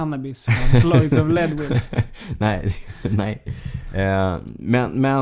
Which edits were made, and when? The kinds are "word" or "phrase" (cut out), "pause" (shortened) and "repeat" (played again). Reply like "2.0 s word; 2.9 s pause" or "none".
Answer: none